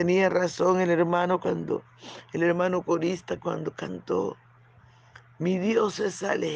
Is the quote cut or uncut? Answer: uncut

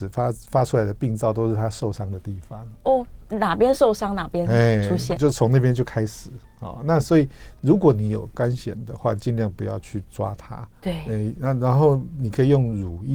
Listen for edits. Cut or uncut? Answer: cut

